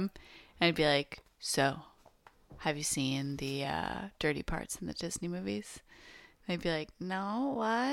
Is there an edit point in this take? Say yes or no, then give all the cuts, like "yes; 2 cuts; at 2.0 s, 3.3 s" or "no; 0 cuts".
no; 0 cuts